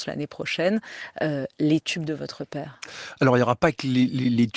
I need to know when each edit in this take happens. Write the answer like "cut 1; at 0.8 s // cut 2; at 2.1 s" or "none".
none